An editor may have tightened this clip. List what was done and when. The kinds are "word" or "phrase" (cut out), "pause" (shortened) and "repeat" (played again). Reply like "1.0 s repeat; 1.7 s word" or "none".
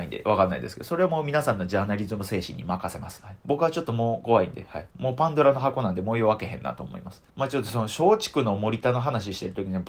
3.4 s pause; 4.9 s pause; 7.3 s pause